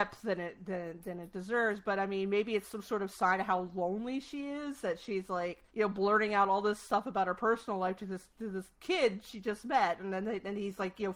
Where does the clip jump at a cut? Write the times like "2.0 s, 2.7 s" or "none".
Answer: 5.7 s, 8.7 s